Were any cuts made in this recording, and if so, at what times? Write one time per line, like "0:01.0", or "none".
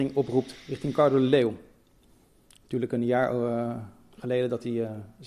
none